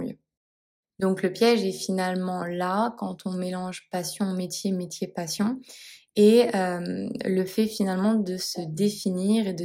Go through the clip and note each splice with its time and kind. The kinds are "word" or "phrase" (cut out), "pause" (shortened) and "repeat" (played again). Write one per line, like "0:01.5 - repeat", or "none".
none

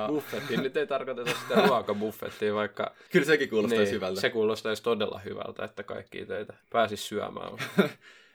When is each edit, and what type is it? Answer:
0:03.1 - pause
0:06.6 - pause

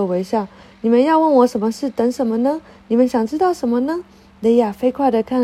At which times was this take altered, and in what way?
none

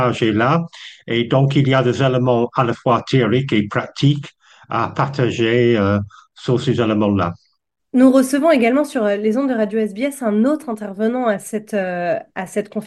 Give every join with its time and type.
none

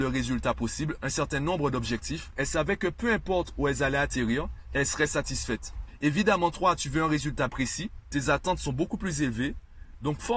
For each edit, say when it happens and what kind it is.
0:07.5 - word

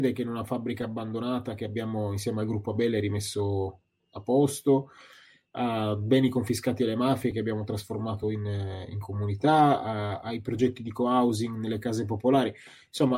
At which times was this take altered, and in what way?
none

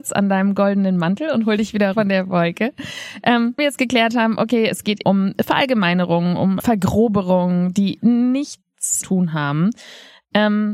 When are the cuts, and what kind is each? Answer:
0:01.9 - word
0:03.6 - word
0:05.0 - phrase
0:06.6 - word
0:09.0 - phrase

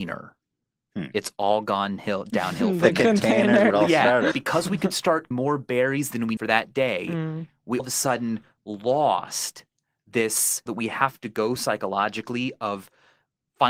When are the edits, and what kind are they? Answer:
0:03.7 - word
0:04.3 - word
0:05.3 - word
0:06.4 - word
0:07.8 - word
0:10.7 - word
0:11.6 - word

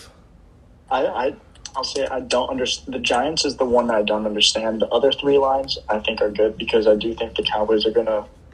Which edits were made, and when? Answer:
none

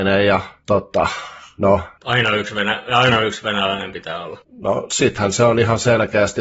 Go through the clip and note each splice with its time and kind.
0:02.0 - word
0:04.4 - pause

